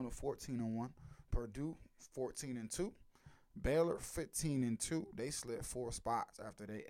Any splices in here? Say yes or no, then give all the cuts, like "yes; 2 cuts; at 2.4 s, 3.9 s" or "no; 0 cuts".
no; 0 cuts